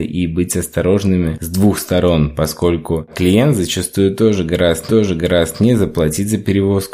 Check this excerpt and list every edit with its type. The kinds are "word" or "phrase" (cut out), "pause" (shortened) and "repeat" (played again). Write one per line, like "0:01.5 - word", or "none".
0:04.9 - repeat